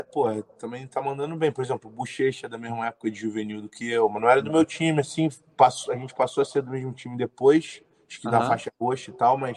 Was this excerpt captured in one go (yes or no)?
yes